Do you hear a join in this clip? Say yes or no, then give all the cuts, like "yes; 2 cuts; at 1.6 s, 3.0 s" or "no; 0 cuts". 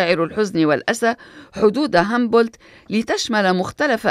no; 0 cuts